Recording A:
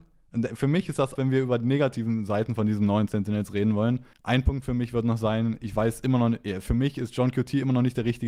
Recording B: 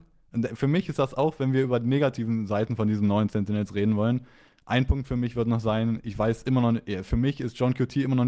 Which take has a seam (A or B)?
A